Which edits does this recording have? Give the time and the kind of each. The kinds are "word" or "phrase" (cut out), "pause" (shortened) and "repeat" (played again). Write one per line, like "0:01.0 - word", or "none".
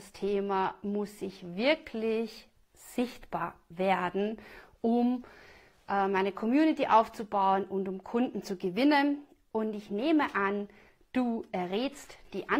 none